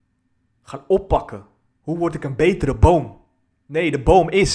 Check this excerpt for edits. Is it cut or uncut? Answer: uncut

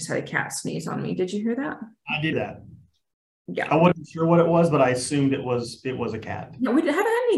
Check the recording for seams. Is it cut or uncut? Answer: cut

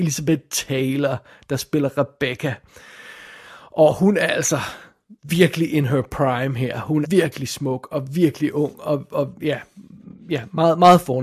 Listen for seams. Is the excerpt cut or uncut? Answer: cut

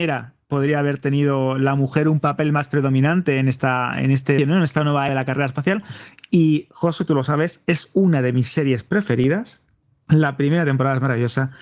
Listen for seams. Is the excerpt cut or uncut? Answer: cut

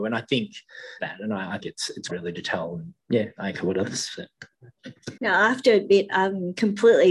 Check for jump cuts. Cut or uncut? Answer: cut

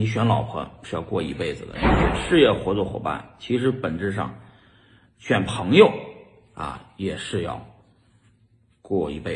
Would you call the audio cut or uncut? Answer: uncut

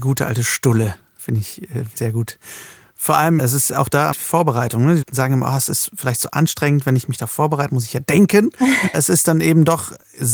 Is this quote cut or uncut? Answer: cut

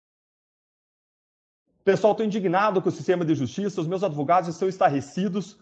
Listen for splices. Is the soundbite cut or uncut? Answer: uncut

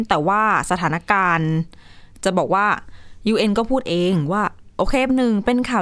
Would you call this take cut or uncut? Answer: uncut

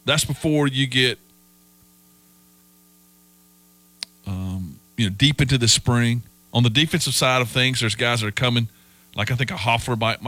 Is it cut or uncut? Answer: uncut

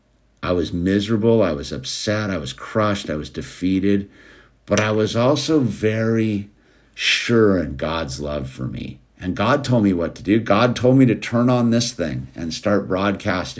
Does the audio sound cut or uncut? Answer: uncut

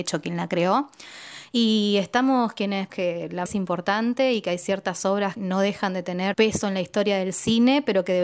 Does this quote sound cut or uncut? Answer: cut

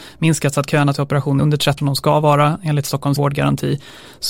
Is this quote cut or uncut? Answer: cut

